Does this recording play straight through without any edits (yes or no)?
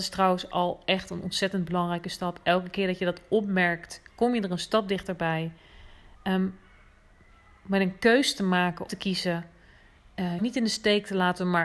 no